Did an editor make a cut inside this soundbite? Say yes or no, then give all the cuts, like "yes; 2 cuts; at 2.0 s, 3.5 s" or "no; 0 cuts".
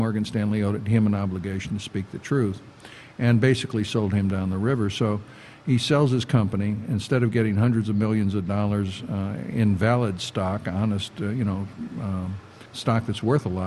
yes; 1 cut; at 12.7 s